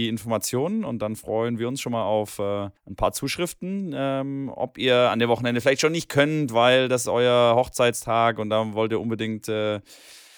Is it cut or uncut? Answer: cut